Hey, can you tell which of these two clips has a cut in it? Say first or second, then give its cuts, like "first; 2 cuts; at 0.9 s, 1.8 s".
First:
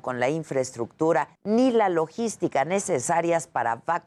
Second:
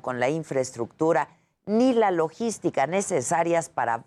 first; 1 cut; at 1.4 s